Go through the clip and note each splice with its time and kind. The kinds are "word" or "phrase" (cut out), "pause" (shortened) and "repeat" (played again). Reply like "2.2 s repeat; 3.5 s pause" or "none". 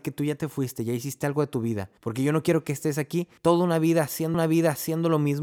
2.0 s pause; 3.4 s pause; 4.3 s repeat